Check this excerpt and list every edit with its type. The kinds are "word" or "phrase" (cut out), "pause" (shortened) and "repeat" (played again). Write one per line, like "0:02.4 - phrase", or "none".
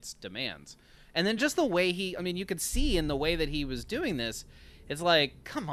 none